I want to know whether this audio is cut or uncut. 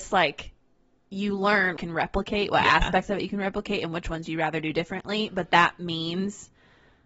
cut